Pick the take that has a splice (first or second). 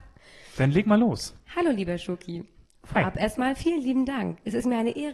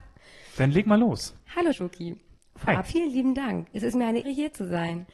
second